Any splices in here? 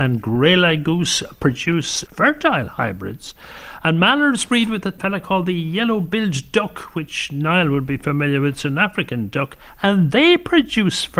no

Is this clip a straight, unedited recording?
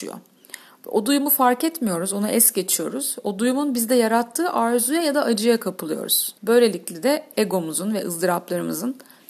no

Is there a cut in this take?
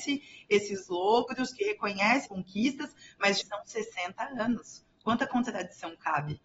yes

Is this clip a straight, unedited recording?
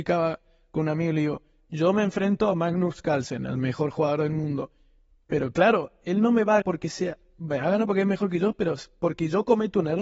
no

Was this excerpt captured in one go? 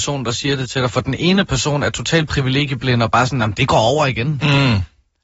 yes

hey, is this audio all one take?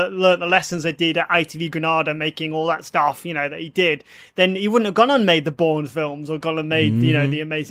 yes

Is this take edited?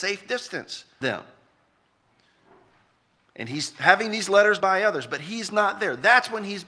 yes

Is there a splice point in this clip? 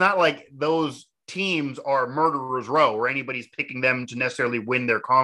no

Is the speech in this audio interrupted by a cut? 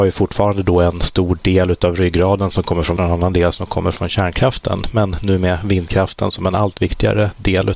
yes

